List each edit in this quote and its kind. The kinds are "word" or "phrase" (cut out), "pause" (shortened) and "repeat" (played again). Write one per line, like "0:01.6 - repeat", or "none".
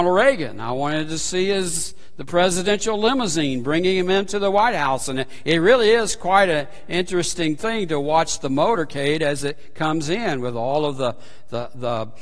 none